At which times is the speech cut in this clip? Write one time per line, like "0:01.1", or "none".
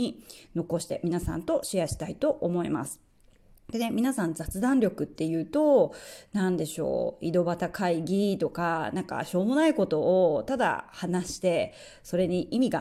none